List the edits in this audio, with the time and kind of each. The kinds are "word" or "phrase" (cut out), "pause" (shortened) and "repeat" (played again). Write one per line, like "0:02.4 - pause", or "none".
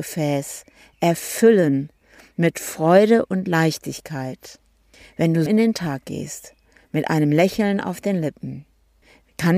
0:05.5 - word